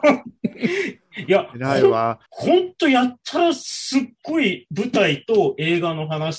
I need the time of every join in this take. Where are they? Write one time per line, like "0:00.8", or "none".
0:02.3